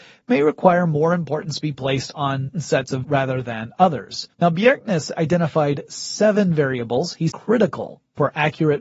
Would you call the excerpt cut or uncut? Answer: cut